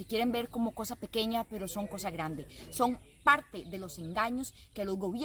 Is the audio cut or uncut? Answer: uncut